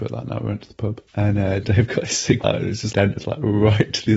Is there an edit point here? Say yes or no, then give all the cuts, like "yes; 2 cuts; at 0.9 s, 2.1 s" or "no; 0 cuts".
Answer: yes; 4 cuts; at 1.1 s, 1.6 s, 2.4 s, 2.9 s